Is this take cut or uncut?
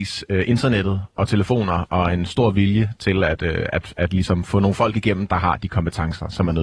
uncut